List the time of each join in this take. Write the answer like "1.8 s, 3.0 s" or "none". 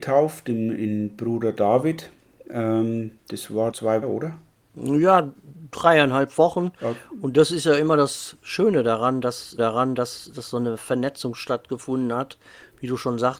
3.7 s, 4.0 s, 9.6 s

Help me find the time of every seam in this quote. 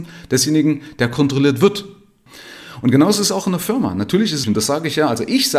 4.4 s

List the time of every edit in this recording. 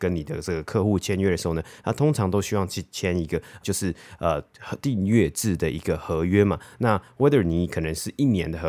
3.6 s

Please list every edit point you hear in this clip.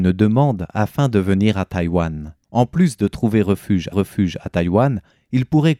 2.4 s, 3.9 s

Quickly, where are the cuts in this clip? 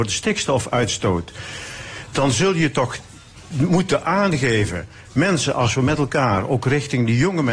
none

